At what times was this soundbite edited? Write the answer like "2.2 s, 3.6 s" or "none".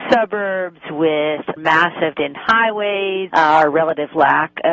1.6 s, 2.1 s, 3.3 s

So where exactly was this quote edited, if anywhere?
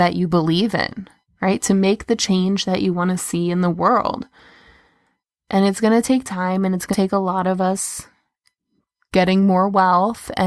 6.9 s

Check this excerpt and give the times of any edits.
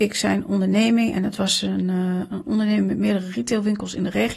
none

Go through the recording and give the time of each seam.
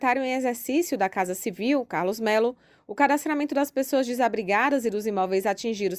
none

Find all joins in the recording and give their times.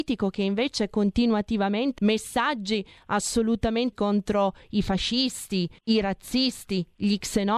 2.0 s, 3.9 s, 5.8 s

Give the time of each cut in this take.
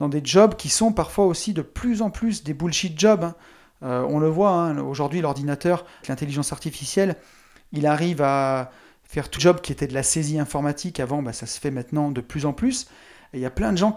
6.0 s, 9.4 s

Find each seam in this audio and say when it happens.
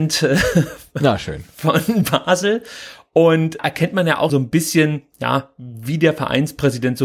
3.6 s, 4.3 s

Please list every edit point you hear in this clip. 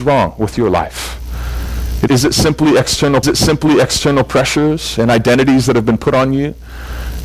2.1 s, 3.2 s

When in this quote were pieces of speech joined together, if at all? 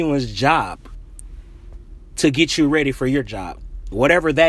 none

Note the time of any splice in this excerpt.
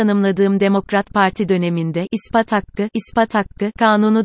2.9 s

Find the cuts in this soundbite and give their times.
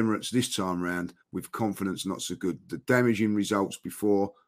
1.2 s

